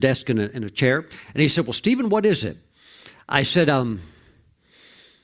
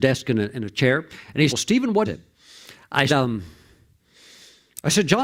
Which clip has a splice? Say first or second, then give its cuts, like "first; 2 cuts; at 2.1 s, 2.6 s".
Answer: second; 3 cuts; at 1.5 s, 2.1 s, 3.1 s